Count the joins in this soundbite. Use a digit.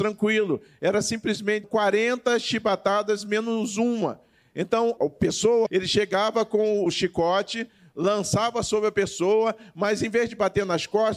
4